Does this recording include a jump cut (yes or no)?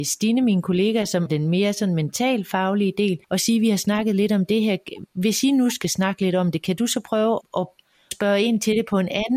yes